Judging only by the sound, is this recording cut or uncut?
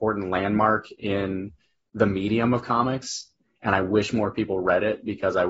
uncut